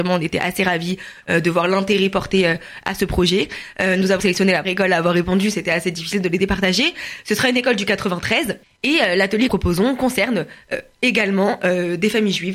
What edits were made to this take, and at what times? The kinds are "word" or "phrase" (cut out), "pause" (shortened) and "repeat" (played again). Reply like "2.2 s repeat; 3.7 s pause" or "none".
4.2 s word; 4.6 s word; 8.6 s pause; 9.5 s phrase